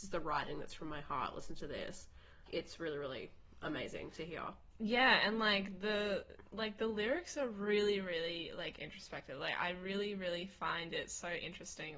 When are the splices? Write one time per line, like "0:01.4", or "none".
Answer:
0:02.5